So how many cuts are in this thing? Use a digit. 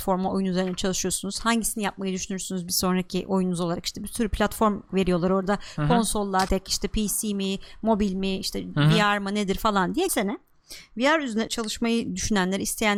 3